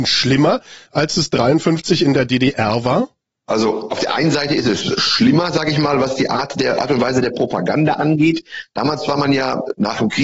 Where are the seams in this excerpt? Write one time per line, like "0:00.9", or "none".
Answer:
none